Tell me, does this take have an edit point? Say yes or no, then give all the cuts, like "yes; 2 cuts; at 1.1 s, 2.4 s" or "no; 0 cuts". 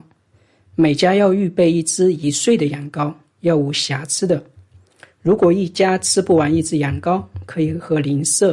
no; 0 cuts